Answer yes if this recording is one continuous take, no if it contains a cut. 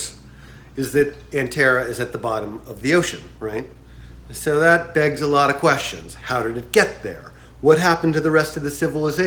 yes